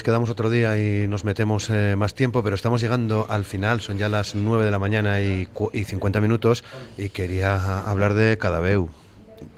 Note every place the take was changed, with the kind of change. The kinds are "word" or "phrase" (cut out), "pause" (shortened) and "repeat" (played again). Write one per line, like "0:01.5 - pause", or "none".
none